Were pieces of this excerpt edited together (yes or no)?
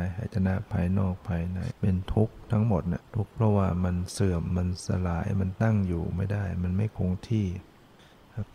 yes